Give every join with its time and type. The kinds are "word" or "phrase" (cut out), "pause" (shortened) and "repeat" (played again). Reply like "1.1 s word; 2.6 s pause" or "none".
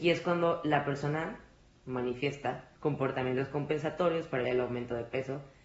2.8 s pause; 4.4 s word